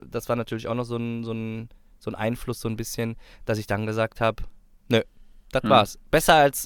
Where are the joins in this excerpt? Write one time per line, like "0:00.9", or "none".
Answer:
none